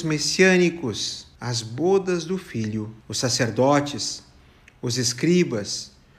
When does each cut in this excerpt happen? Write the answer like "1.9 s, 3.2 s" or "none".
1.3 s, 3.0 s